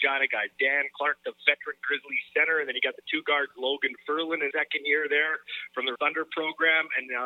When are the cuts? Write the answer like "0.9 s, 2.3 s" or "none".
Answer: 4.5 s, 5.9 s